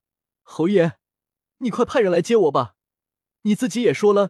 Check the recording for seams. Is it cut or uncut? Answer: uncut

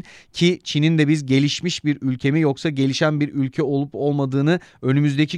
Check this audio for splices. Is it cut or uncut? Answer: uncut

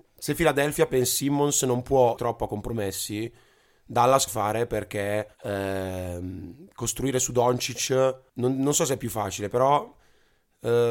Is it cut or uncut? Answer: cut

